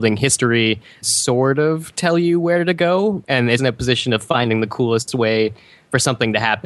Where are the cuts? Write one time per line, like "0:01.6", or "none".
0:01.0
0:03.6